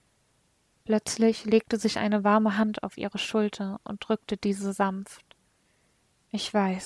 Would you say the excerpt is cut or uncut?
uncut